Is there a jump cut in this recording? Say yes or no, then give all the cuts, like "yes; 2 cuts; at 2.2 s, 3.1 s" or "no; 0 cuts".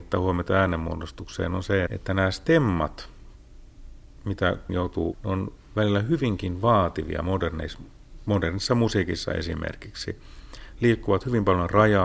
yes; 3 cuts; at 1.9 s, 4.7 s, 5.1 s